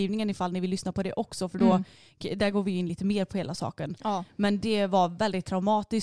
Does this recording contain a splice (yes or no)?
no